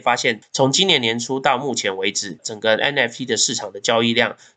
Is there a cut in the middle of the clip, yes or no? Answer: no